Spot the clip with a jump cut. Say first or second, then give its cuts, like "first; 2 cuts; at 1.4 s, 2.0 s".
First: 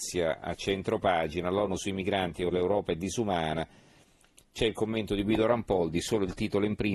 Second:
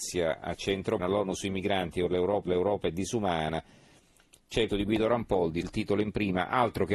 second; 4 cuts; at 1.0 s, 2.5 s, 4.7 s, 5.6 s